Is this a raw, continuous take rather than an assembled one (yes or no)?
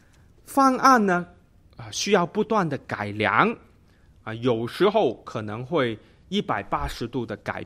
yes